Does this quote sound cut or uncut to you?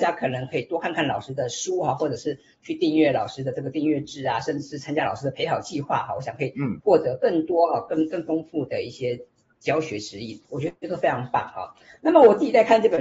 cut